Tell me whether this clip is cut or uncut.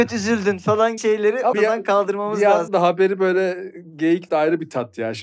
cut